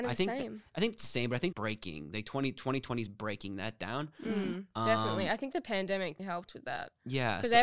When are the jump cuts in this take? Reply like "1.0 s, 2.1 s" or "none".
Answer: 1.5 s, 6.2 s